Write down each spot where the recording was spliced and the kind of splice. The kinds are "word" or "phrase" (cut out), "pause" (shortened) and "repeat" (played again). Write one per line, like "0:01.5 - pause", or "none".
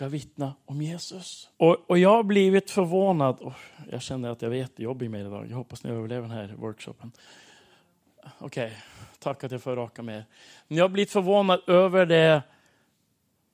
0:01.5 - pause